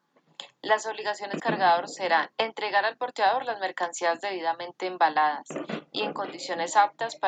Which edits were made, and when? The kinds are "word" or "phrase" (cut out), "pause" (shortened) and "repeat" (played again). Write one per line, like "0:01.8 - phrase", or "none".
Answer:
0:01.4 - word
0:02.3 - pause